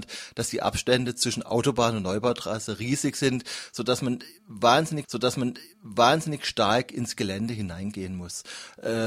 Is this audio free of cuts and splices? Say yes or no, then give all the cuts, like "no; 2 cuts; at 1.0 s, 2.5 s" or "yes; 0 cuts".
no; 1 cut; at 5.0 s